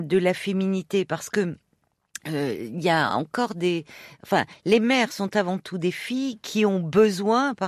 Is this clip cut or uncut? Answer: uncut